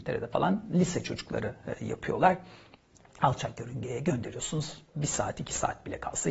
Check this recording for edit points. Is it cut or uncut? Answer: uncut